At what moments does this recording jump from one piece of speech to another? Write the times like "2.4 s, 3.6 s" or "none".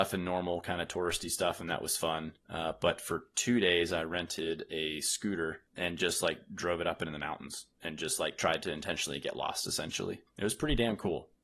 none

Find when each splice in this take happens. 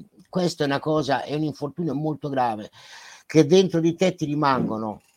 none

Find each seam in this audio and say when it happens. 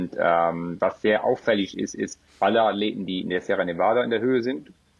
2.3 s

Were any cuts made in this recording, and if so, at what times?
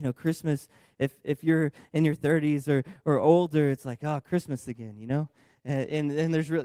none

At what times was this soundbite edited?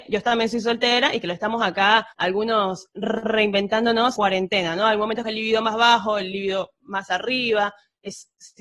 2.1 s, 4.2 s, 5.2 s

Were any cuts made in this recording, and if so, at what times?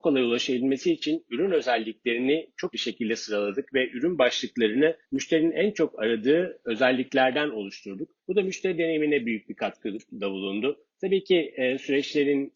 2.7 s, 5.0 s, 8.2 s

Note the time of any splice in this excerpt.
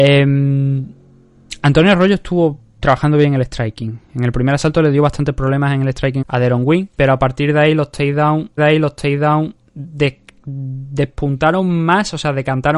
6.2 s, 6.9 s, 8.6 s

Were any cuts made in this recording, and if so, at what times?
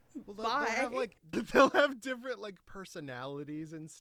1.3 s

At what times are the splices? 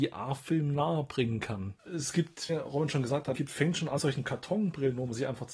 2.5 s, 3.3 s, 4.0 s

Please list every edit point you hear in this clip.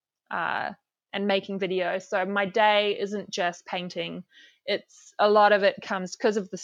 none

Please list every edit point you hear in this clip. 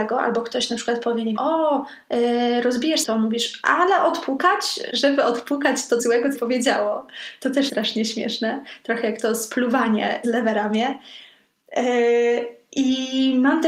1.4 s, 3.0 s, 4.9 s, 6.0 s, 6.3 s, 7.7 s, 10.2 s

